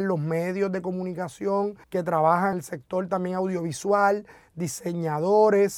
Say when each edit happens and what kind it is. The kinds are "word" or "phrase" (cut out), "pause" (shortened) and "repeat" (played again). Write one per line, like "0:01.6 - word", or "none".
0:01.8 - pause
0:02.5 - word